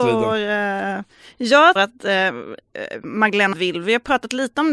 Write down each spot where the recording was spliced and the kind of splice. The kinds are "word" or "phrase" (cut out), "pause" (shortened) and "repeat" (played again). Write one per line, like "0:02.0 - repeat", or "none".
0:01.8 - word
0:03.5 - word